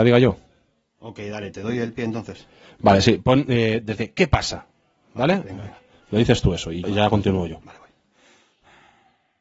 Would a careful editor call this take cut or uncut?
cut